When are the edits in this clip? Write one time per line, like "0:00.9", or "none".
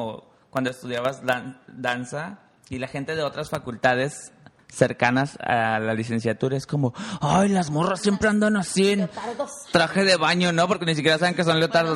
0:04.6